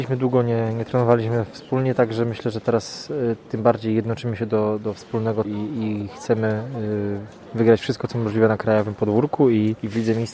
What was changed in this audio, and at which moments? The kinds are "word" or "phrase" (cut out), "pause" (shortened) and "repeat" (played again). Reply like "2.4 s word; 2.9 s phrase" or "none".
5.4 s word